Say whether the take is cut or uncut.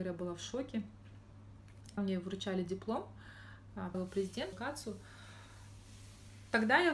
cut